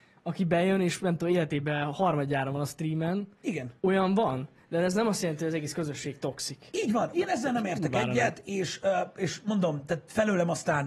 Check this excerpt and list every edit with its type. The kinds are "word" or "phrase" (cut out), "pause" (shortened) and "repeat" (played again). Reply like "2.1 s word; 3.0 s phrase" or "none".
3.8 s pause; 7.1 s word